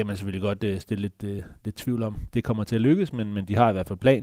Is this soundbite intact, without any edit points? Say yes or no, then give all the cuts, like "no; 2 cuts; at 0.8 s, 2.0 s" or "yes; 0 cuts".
yes; 0 cuts